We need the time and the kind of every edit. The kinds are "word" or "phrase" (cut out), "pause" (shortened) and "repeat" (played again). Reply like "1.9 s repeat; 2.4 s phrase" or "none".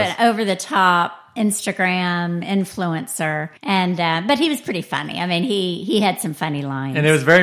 3.6 s pause